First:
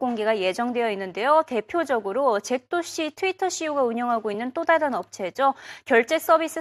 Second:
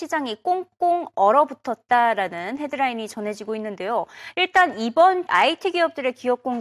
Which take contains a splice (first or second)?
second